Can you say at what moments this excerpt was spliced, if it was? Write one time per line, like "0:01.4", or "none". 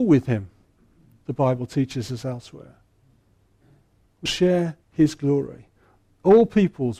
0:04.3
0:04.8